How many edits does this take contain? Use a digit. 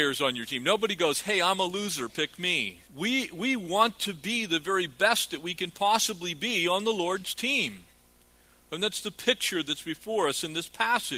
1